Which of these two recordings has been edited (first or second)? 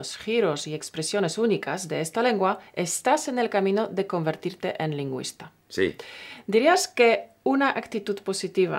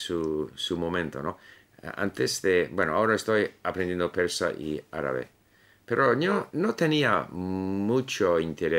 first